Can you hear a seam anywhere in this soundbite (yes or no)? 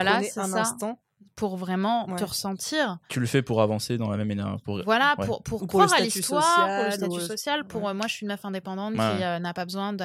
no